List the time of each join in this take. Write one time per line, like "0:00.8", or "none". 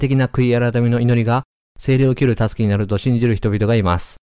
none